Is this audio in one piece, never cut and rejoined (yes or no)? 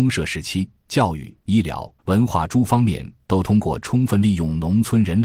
no